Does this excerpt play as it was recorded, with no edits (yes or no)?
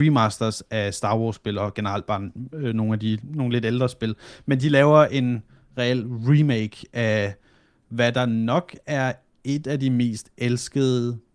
yes